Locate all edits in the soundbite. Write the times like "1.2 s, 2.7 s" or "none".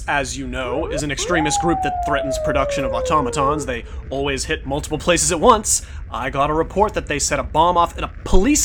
none

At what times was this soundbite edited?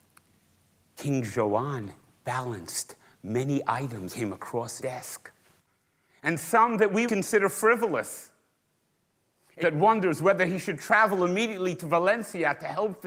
4.1 s, 4.8 s, 7.1 s, 9.6 s

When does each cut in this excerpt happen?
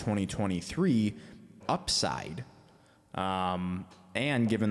1.6 s

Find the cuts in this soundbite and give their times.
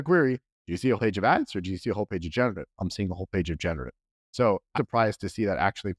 1.0 s, 2.8 s, 4.8 s

